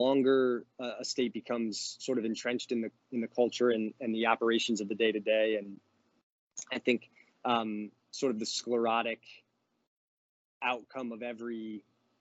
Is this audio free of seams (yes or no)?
yes